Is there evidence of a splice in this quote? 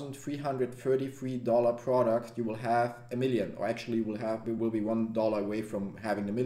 no; 0 cuts

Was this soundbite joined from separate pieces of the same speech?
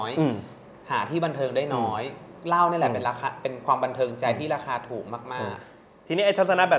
no; 0 cuts

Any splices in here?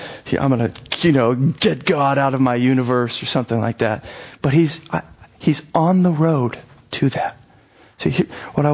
no; 0 cuts

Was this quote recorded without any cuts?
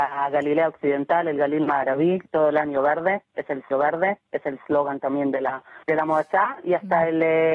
no; 3 cuts; at 2.3 s, 3.7 s, 5.8 s

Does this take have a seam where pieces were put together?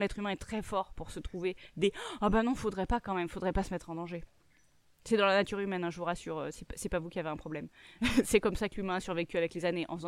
no; 0 cuts

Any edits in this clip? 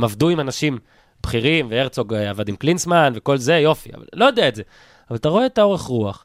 no; 0 cuts

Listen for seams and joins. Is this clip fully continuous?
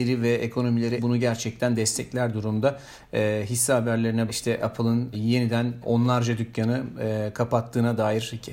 no; 4 cuts; at 1.0 s, 4.3 s, 5.1 s, 5.8 s

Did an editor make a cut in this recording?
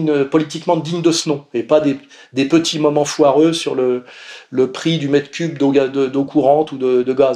no; 0 cuts

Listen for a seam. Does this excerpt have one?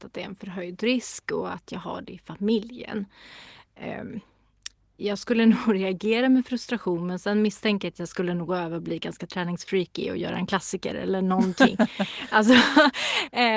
no; 0 cuts

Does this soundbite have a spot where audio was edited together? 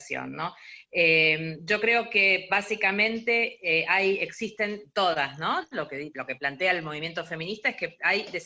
yes; 1 cut; at 6.1 s

